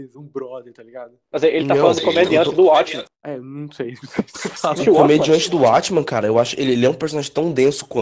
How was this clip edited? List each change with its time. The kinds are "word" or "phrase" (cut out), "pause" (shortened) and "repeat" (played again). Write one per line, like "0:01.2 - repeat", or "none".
0:01.2 - pause
0:03.1 - pause
0:04.8 - word